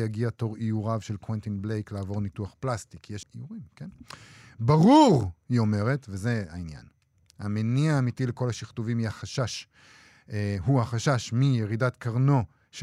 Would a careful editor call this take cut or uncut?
cut